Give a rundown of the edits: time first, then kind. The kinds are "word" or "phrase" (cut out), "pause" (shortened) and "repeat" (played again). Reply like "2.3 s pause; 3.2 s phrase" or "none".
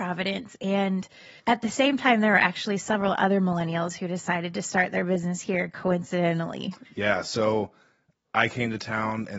1.4 s pause